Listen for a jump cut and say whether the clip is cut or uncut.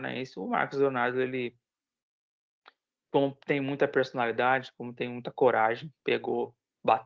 uncut